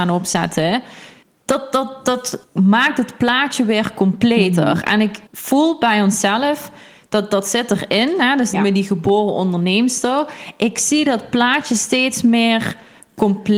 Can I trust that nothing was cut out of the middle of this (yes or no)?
no